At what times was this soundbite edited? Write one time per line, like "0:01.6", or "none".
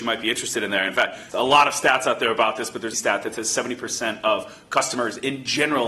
0:01.3
0:02.9